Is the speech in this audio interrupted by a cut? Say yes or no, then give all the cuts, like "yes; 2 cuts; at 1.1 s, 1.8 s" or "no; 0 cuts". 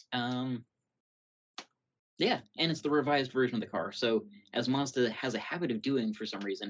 yes; 1 cut; at 2.0 s